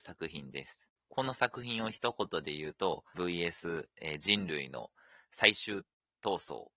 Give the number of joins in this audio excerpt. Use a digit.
1